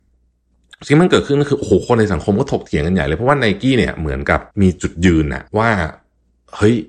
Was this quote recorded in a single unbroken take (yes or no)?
no